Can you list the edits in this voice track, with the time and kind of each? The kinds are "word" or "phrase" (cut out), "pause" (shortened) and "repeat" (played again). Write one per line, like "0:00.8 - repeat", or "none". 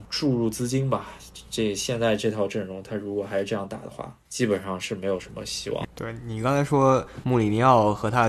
0:04.3 - pause